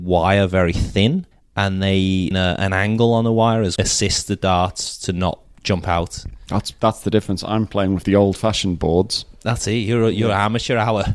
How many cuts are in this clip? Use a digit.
3